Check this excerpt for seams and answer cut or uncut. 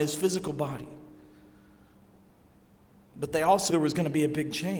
cut